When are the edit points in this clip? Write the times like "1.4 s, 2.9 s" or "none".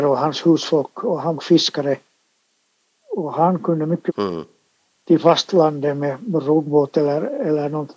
1.4 s, 4.1 s